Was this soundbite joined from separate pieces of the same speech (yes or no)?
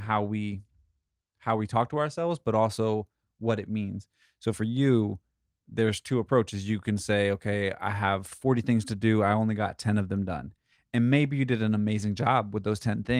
no